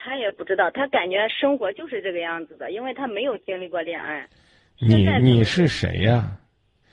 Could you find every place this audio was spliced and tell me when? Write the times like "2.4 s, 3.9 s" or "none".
none